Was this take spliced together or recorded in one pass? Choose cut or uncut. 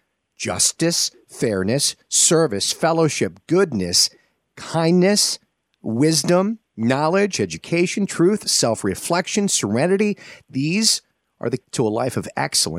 cut